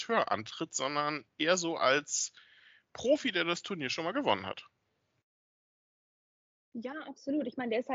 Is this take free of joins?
yes; 0 cuts

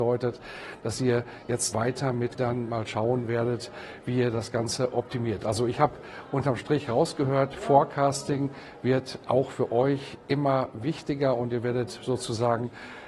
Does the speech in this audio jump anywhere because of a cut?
yes; 2 cuts; at 1.7 s, 2.4 s

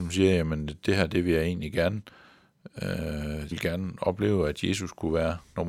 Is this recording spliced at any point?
yes; 1 cut; at 3.5 s

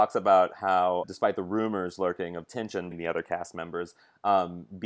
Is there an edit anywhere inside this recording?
yes; 2 cuts; at 1.0 s, 2.9 s

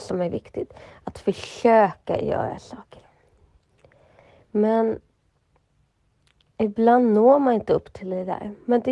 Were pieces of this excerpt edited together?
no; 0 cuts

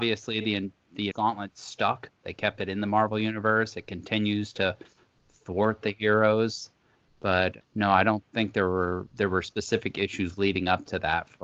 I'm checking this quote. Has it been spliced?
yes; 2 cuts; at 1.1 s, 7.6 s

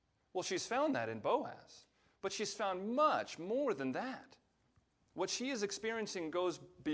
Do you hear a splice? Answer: no; 0 cuts

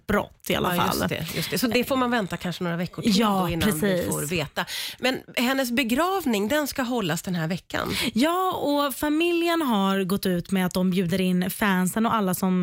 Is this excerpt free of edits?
yes; 0 cuts

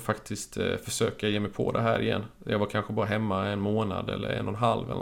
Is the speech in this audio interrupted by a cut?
no; 0 cuts

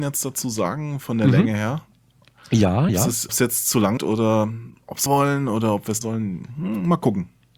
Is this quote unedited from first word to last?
no; 5 cuts; at 2.9 s, 3.3 s, 4.0 s, 5.1 s, 6.0 s

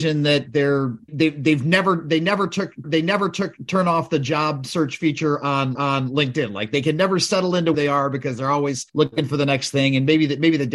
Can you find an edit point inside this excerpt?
yes; 5 cuts; at 1.1 s, 2.8 s, 5.7 s, 7.7 s, 8.9 s

